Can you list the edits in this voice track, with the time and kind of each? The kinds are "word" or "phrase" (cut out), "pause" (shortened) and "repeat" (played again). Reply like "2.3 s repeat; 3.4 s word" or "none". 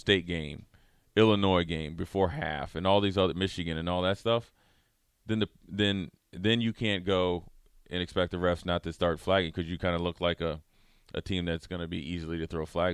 none